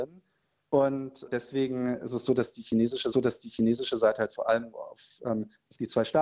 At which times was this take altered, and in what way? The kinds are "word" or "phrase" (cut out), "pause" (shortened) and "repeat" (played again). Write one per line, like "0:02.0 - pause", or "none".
0:01.3 - word
0:03.1 - repeat
0:04.7 - word